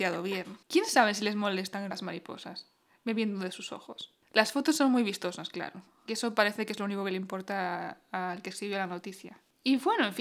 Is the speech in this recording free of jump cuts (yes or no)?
no